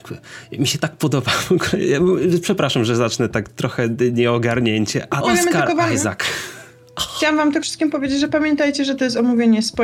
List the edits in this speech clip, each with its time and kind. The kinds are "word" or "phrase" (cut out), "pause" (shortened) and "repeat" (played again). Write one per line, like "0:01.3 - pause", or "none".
0:04.1 - word
0:05.2 - word
0:07.6 - word